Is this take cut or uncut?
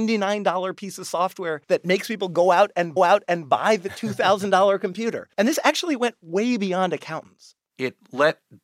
cut